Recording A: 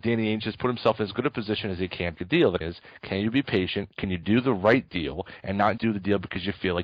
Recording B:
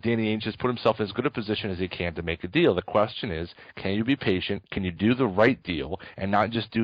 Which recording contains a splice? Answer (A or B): A